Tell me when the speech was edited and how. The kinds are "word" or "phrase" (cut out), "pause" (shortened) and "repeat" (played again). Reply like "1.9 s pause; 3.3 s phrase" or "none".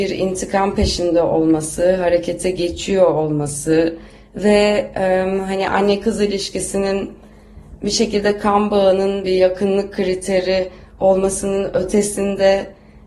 none